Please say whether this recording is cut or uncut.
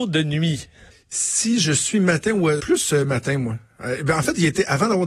cut